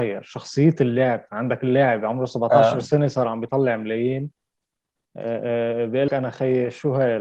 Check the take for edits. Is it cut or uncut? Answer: cut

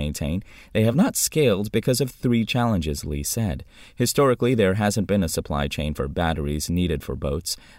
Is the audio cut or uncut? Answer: uncut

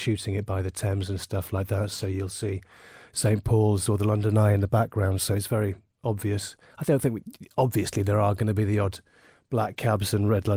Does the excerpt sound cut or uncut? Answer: uncut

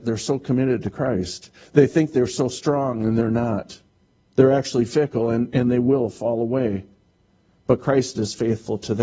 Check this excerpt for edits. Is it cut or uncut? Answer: uncut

